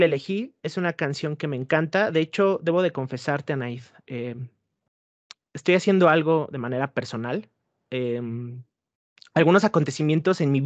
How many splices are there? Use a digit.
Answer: 0